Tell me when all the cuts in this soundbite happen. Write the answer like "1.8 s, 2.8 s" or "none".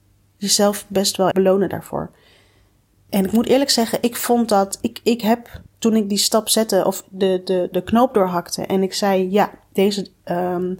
1.3 s, 7.7 s